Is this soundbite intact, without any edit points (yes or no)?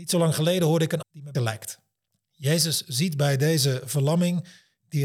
no